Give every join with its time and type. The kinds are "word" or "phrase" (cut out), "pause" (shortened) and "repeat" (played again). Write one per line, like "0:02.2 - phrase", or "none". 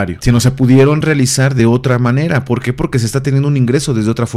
none

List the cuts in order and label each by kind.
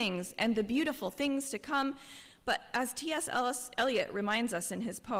none

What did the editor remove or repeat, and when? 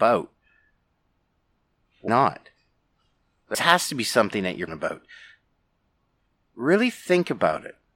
0:02.1 - word
0:03.5 - word
0:04.7 - word

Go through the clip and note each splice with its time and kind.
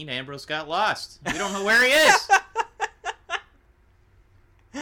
none

